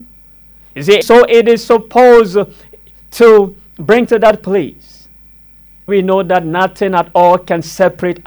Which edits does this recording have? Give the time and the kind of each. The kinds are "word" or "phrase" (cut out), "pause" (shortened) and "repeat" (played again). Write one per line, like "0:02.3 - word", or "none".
0:01.0 - word
0:04.0 - word
0:05.9 - word